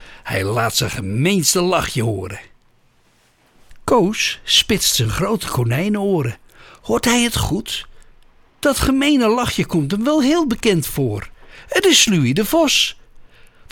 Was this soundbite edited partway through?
no; 0 cuts

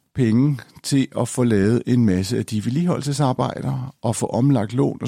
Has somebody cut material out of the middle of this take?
no; 0 cuts

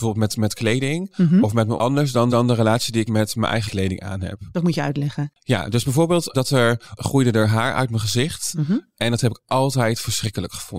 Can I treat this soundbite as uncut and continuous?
no; 6 cuts; at 1.8 s, 2.3 s, 3.1 s, 3.7 s, 6.3 s, 7.0 s

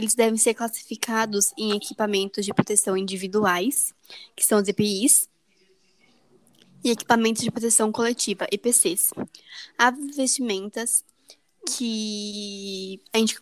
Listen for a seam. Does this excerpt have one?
no; 0 cuts

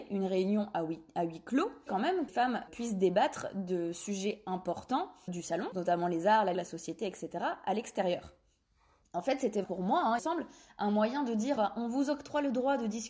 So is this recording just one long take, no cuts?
no; 9 cuts; at 1.9 s, 2.3 s, 2.7 s, 5.3 s, 5.7 s, 6.5 s, 9.6 s, 10.2 s, 11.6 s

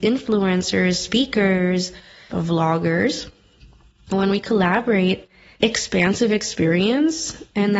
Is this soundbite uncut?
no; 3 cuts; at 2.3 s, 4.1 s, 5.6 s

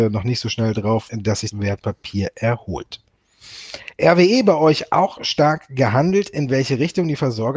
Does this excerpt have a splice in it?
yes; 2 cuts; at 1.1 s, 1.5 s

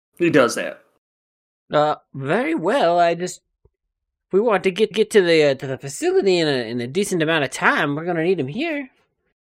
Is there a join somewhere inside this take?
yes; 1 cut; at 4.9 s

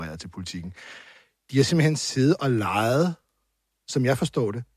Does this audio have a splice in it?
no; 0 cuts

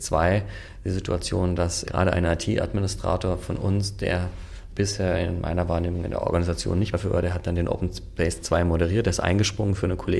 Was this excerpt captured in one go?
no; 3 cuts; at 1.8 s, 4.7 s, 6.9 s

